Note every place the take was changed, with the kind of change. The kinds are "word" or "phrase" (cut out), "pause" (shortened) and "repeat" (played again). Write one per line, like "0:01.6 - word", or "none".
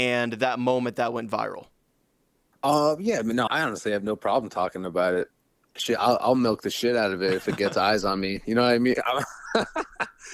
0:03.5 - word